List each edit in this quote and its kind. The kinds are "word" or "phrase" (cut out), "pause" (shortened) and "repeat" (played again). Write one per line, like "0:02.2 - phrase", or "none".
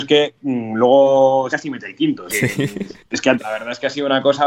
0:01.5 - word
0:02.3 - word
0:03.4 - word